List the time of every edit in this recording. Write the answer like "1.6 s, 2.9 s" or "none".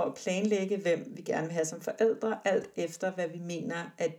none